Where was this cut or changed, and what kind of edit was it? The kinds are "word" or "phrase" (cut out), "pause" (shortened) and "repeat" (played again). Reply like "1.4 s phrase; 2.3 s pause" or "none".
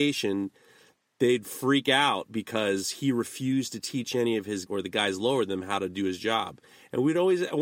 4.7 s word

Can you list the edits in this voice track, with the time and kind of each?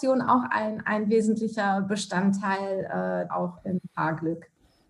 3.3 s word

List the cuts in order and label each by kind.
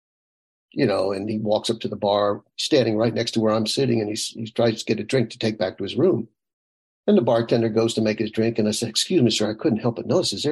none

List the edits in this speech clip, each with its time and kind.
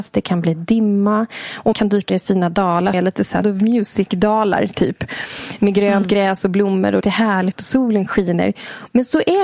1.7 s word; 2.1 s word; 2.9 s word; 3.4 s word; 7.0 s word

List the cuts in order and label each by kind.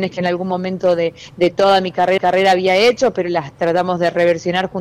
2.2 s repeat

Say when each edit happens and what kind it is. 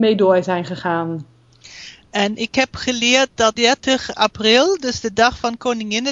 3.5 s word

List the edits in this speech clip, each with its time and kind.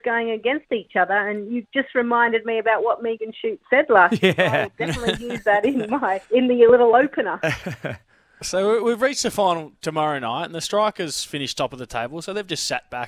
6.3 s pause

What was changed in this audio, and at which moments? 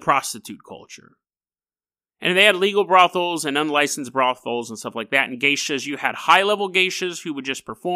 none

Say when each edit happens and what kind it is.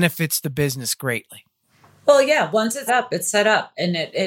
2.9 s word

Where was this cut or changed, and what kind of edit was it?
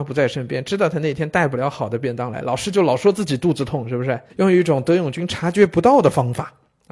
4.3 s pause

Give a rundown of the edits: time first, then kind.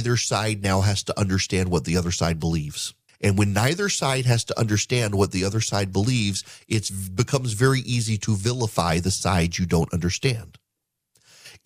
3.1 s pause

